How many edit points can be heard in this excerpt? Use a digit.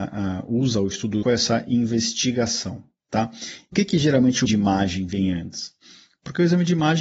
3